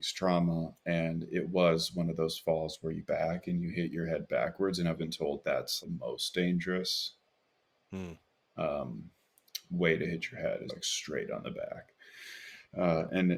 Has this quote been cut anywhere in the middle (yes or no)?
yes